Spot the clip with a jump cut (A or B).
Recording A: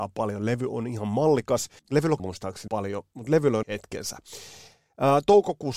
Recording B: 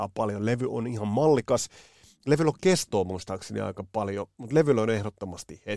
A